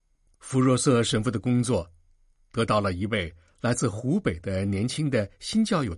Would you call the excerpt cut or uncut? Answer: uncut